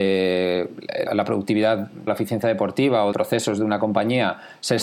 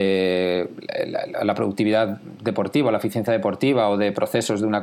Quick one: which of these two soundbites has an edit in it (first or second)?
first